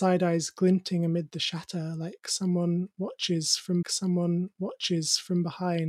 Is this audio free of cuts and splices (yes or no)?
no